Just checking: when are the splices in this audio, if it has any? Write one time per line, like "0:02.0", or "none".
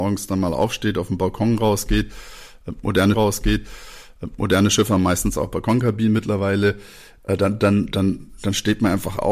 0:03.1